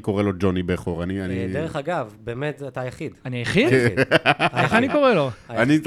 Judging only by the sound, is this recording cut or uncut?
uncut